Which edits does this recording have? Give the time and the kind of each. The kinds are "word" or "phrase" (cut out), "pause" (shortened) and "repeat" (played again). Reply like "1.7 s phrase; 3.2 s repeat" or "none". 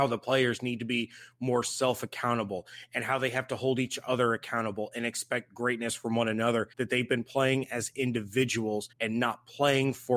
6.7 s pause; 8.9 s pause